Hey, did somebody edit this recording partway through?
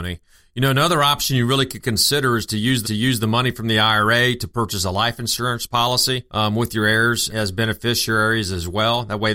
yes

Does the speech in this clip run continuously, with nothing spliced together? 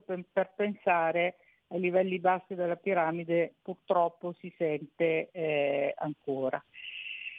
yes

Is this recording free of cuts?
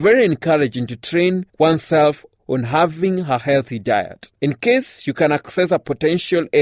no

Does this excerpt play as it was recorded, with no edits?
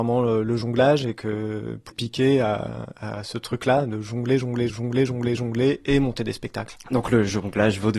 no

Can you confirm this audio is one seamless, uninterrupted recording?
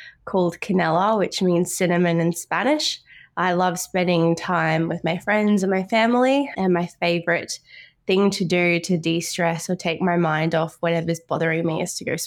yes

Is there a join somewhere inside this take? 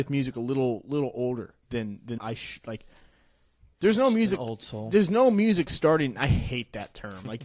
yes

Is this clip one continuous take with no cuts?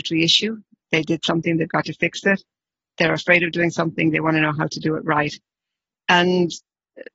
yes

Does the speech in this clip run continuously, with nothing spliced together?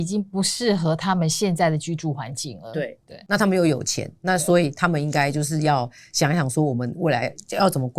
yes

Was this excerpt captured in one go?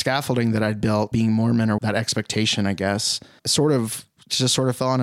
no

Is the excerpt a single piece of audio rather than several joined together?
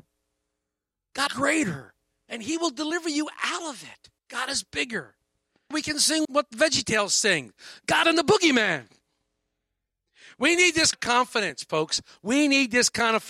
no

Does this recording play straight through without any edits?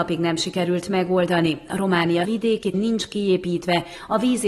no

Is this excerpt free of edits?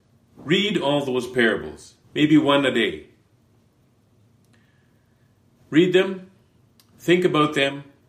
no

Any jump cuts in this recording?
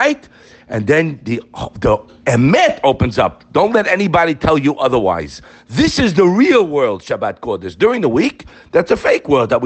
no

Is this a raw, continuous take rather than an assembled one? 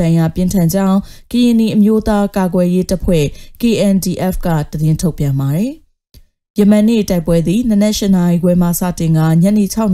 yes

